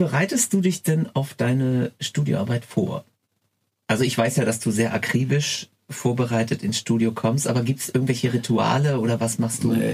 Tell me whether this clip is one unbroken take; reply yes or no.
yes